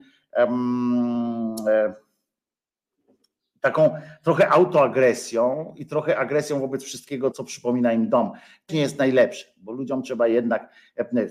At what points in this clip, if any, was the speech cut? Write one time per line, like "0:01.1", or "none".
0:07.3
0:08.7